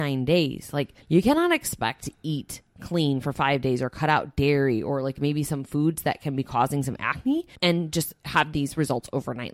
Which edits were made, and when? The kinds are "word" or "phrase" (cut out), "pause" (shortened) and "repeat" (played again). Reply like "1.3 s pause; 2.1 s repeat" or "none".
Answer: 1.0 s pause; 7.6 s pause